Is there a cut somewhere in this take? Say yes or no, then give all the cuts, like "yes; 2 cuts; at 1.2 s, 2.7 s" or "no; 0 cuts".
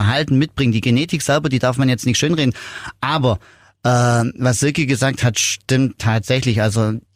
no; 0 cuts